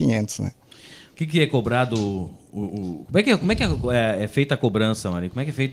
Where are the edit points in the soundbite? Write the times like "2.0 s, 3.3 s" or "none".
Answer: none

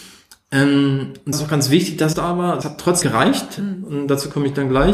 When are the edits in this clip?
1.3 s, 2.1 s, 2.6 s, 3.0 s

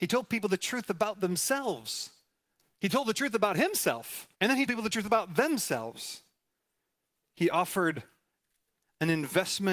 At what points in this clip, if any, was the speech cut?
4.3 s, 4.7 s

